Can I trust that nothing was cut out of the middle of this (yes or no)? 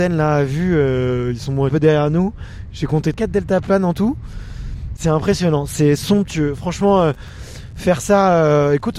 no